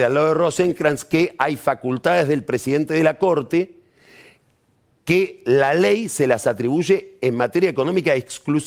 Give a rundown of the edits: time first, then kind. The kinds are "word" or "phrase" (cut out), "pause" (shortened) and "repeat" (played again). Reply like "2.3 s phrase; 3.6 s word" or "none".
none